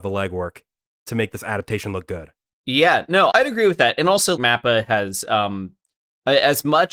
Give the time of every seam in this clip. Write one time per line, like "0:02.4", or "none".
0:03.3
0:04.4